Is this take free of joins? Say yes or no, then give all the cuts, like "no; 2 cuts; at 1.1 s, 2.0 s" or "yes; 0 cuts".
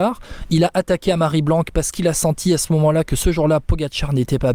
yes; 0 cuts